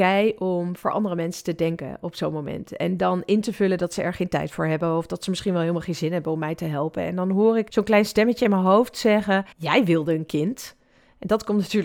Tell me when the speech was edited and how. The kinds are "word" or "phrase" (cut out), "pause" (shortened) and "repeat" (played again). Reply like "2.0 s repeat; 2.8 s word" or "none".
9.5 s pause

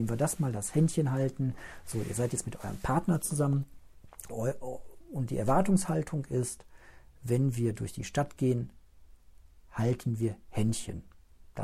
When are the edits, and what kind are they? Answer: 4.3 s word

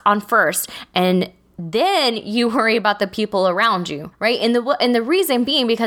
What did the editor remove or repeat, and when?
4.1 s pause

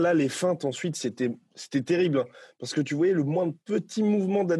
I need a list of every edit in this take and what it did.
none

